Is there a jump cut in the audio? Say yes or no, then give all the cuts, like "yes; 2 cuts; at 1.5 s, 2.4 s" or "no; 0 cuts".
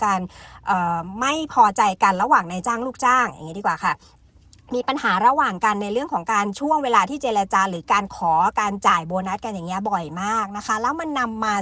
no; 0 cuts